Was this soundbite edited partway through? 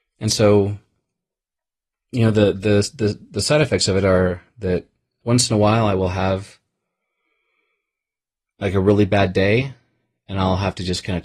no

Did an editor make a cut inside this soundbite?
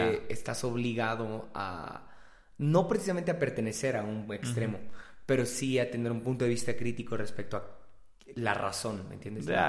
no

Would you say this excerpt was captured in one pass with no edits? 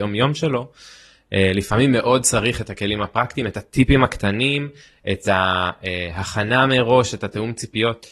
yes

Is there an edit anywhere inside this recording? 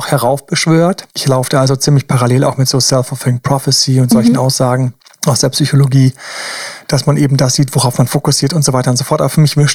yes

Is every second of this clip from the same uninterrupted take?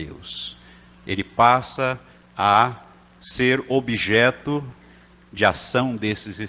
yes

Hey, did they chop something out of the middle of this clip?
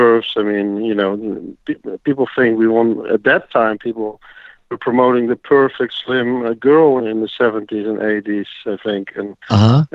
yes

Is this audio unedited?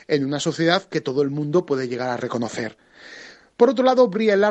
yes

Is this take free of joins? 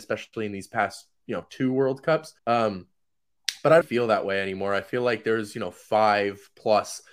no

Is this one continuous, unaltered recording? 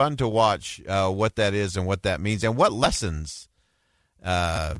yes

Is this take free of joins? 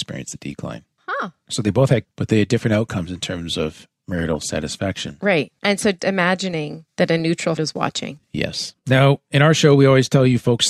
no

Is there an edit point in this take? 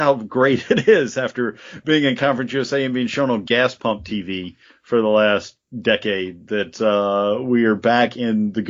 no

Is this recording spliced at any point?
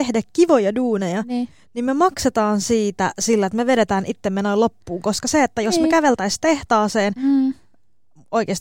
no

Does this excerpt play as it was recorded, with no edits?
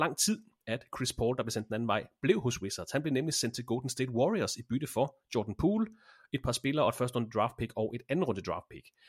yes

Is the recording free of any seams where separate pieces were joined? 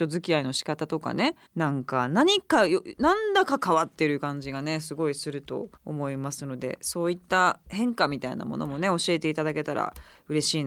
no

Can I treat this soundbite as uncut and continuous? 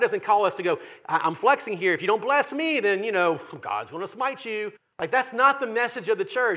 no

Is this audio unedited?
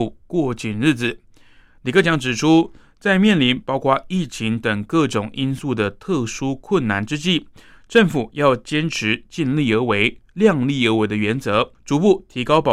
no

